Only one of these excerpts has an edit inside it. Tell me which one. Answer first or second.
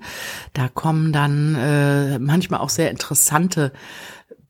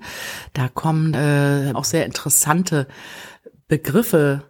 second